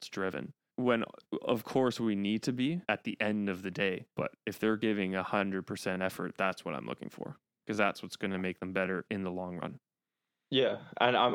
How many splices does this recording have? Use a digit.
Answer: 1